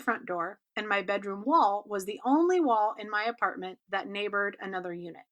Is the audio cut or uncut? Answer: uncut